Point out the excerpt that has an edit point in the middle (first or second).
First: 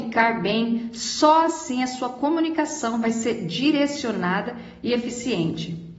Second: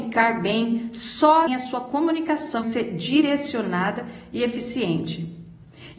second